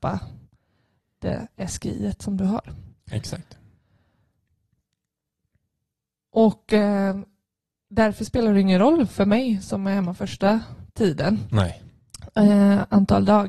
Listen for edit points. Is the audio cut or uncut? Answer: uncut